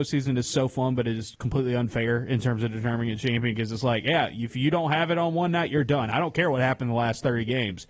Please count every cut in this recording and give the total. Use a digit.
0